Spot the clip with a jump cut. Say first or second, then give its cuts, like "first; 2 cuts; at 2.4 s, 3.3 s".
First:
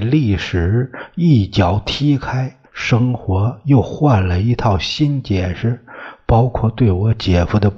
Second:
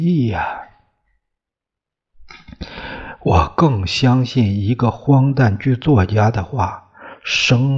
first; 1 cut; at 2.7 s